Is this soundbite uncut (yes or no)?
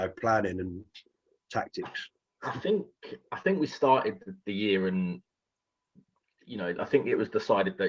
yes